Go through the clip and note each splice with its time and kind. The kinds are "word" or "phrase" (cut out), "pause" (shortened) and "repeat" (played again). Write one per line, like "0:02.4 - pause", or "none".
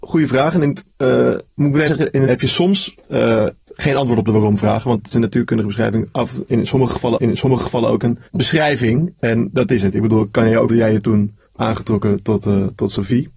0:00.9 - pause
0:01.9 - word
0:02.3 - word
0:03.6 - pause
0:05.1 - phrase
0:07.2 - repeat
0:08.3 - pause
0:10.7 - phrase
0:11.5 - pause